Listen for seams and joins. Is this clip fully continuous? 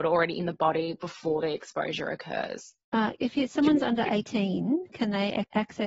no; 1 cut; at 2.8 s

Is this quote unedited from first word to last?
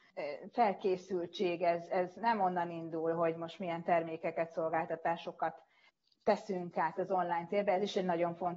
yes; 0 cuts

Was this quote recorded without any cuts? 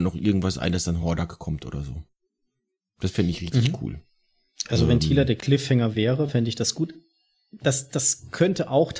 yes; 0 cuts

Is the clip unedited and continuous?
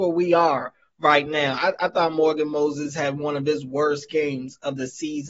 yes; 0 cuts

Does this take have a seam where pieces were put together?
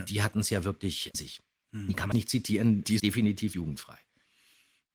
yes; 4 cuts; at 1.1 s, 2.1 s, 3.0 s, 3.5 s

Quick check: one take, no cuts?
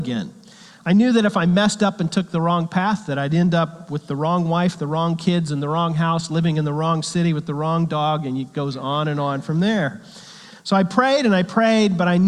yes; 0 cuts

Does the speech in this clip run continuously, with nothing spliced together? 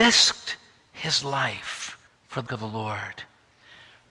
no; 2 cuts; at 2.1 s, 2.5 s

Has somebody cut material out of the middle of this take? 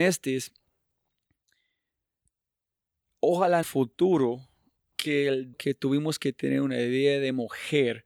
yes; 3 cuts; at 3.6 s, 4.8 s, 5.5 s

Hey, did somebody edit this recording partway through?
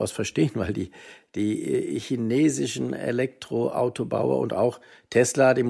no; 0 cuts

